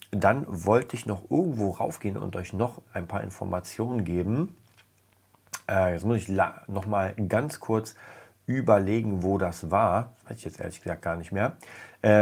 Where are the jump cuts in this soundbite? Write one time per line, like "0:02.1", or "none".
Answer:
none